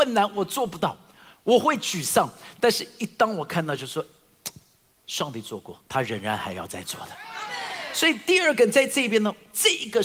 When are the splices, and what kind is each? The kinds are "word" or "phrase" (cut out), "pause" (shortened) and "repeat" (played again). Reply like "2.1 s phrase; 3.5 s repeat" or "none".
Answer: 5.9 s pause